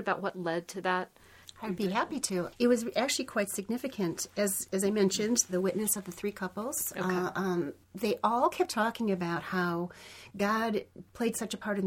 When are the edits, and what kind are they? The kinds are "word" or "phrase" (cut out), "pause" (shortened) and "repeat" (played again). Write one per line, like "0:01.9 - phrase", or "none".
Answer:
0:05.5 - word